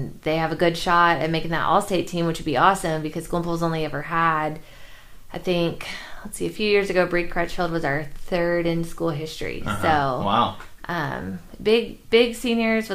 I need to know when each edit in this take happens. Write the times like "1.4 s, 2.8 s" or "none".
none